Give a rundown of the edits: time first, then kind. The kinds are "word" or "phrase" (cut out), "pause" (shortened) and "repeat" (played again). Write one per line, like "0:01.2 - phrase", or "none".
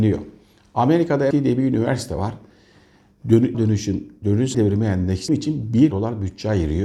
0:01.3 - word
0:03.5 - word
0:04.5 - word
0:05.3 - word
0:05.9 - word